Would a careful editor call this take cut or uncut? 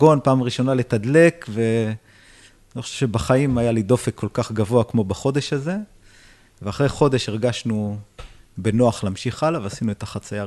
uncut